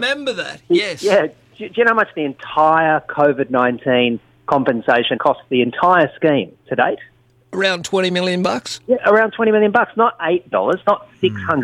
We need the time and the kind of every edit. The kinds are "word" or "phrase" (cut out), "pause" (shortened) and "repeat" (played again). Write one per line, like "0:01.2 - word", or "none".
0:05.2 - word
0:06.6 - word
0:10.5 - word